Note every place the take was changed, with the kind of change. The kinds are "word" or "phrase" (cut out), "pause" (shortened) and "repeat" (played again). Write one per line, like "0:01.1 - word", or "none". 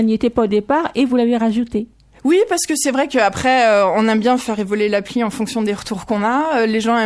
none

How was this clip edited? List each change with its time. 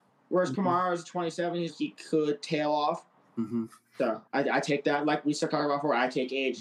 0:01.7 - phrase
0:04.3 - pause

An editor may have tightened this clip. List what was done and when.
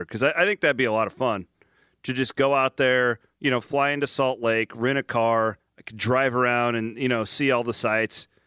0:05.6 - pause

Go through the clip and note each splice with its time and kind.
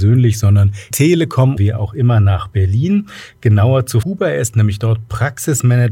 0:00.9 - word
0:01.6 - word
0:04.0 - word

